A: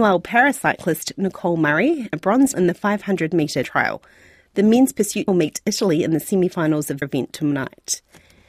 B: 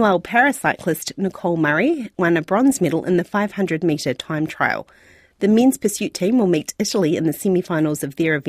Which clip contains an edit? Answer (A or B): A